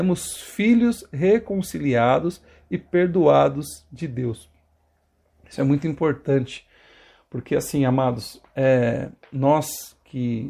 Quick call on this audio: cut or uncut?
uncut